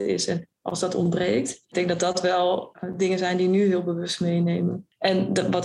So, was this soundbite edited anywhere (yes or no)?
no